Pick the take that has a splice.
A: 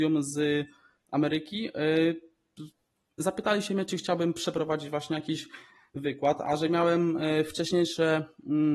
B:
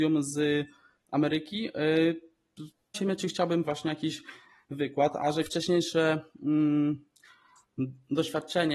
B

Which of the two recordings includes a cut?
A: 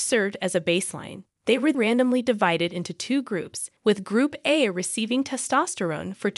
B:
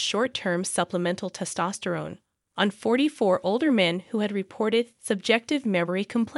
A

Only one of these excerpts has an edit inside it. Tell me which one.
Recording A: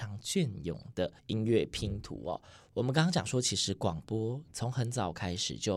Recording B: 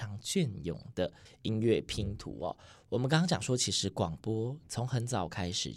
A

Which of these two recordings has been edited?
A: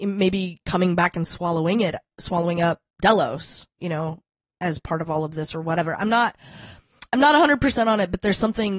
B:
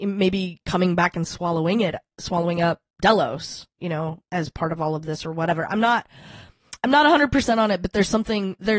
B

